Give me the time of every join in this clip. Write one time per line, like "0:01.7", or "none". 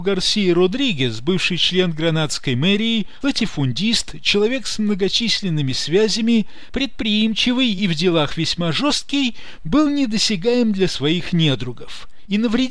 none